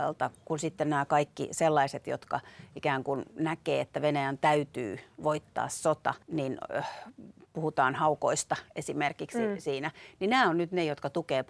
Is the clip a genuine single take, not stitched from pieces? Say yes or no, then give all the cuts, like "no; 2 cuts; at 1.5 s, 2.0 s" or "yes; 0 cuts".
no; 1 cut; at 6.2 s